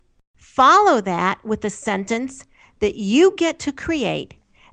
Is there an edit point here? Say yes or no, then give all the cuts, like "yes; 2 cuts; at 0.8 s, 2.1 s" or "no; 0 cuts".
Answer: no; 0 cuts